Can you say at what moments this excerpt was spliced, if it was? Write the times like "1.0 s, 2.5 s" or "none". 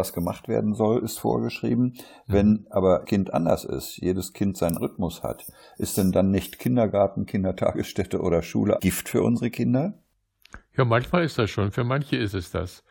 3.1 s, 4.8 s, 8.8 s